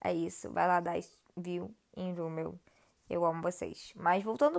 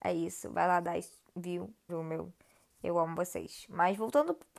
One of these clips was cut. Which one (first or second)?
second